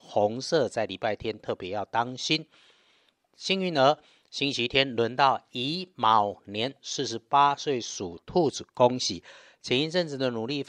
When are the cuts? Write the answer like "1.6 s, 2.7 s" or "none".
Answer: none